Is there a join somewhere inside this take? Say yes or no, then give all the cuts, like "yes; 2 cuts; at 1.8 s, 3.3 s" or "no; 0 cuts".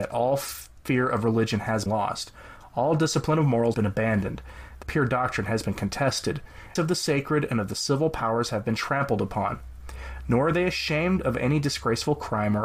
yes; 4 cuts; at 1.9 s, 3.7 s, 4.8 s, 6.8 s